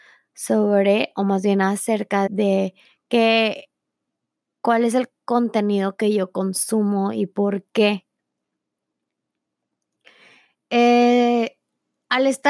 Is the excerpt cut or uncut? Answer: cut